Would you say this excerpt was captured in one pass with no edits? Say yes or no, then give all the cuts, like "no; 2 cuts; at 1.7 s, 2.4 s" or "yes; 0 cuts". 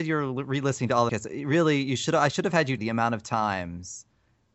no; 2 cuts; at 1.1 s, 2.8 s